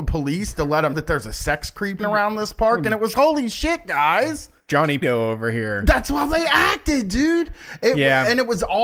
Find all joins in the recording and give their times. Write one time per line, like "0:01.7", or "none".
0:00.9
0:02.0
0:03.1
0:05.0